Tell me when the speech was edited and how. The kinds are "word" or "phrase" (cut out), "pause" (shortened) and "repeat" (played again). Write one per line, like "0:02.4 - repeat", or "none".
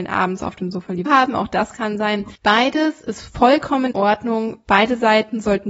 0:01.1 - phrase
0:02.3 - pause
0:03.9 - word